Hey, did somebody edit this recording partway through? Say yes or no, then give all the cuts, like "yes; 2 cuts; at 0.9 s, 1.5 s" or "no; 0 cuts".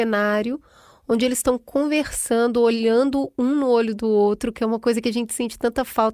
no; 0 cuts